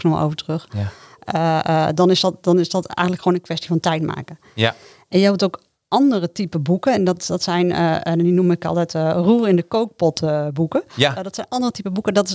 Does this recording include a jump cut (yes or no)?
no